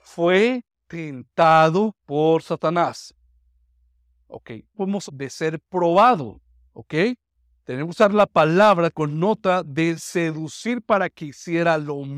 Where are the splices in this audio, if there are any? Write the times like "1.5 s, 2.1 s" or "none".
2.0 s, 4.7 s, 5.1 s, 6.7 s, 8.9 s

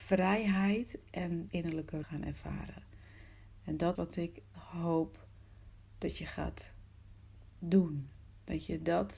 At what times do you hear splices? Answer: 1.5 s, 2.0 s, 4.0 s, 4.5 s

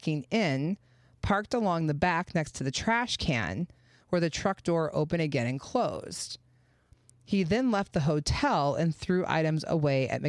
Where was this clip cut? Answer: none

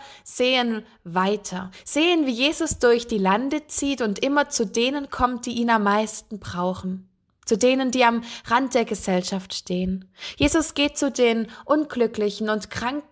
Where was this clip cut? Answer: none

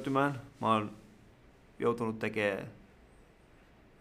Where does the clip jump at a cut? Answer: none

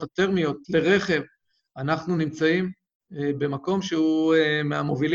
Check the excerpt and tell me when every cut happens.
none

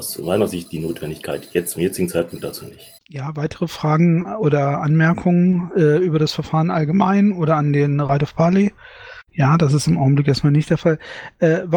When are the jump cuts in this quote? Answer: 3.0 s, 9.3 s

